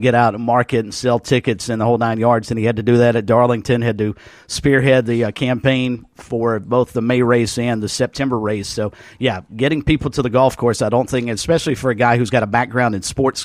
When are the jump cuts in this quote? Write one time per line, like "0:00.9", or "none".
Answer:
none